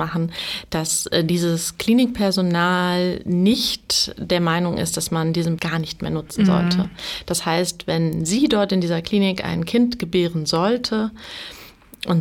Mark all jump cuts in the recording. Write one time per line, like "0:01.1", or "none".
0:05.6